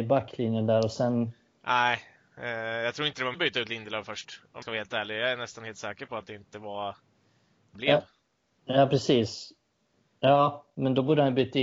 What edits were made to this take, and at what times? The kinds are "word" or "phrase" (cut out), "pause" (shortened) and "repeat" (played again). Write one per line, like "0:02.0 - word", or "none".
0:03.3 - word
0:04.6 - word
0:07.7 - word